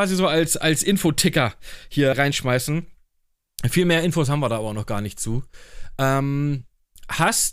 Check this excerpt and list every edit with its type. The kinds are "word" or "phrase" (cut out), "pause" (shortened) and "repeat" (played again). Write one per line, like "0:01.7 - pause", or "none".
0:02.1 - word